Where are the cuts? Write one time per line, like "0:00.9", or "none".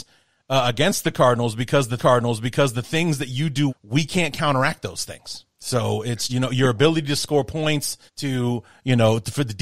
0:02.0
0:03.7
0:05.5
0:06.3
0:08.1